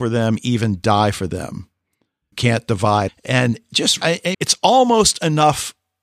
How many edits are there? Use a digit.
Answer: 4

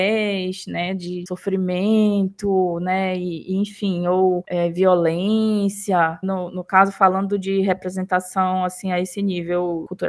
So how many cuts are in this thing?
1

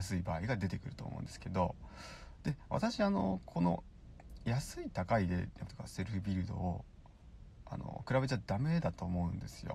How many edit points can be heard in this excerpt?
1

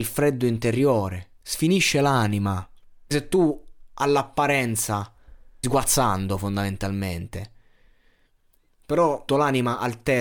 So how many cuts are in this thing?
4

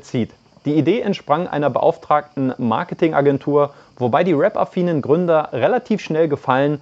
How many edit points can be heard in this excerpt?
0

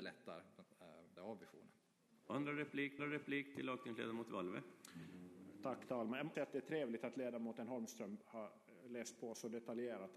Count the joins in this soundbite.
4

